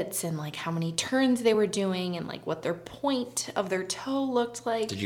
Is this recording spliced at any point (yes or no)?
no